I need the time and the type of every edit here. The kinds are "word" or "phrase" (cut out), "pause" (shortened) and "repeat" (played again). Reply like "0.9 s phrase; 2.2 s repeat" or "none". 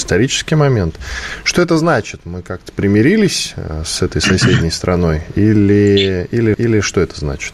6.5 s repeat